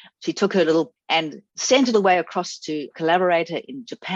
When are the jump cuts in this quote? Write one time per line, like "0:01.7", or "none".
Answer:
0:01.0
0:01.5
0:01.9
0:02.9